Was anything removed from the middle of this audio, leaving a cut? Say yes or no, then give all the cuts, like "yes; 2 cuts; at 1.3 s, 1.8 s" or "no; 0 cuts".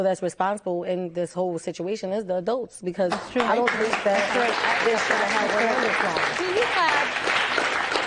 no; 0 cuts